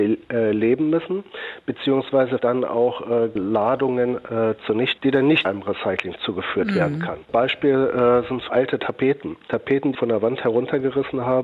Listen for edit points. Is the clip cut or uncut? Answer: cut